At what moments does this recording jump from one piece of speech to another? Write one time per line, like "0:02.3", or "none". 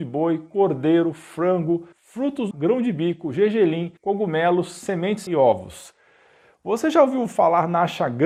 0:01.9
0:02.5
0:04.0
0:05.3